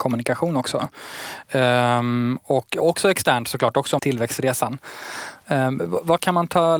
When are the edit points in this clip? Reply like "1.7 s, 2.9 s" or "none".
4.0 s